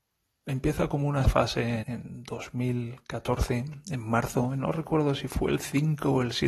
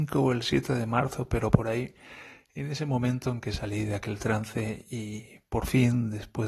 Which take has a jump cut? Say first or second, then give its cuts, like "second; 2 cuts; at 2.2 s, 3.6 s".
first; 2 cuts; at 1.2 s, 1.8 s